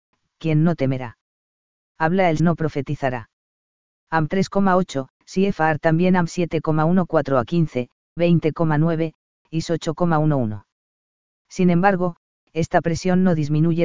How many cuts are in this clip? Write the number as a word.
three